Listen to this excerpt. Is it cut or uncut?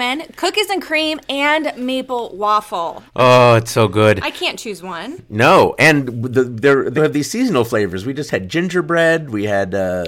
cut